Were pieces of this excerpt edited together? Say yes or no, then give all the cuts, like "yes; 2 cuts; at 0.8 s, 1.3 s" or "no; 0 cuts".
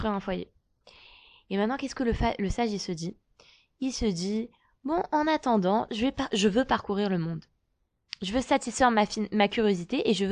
no; 0 cuts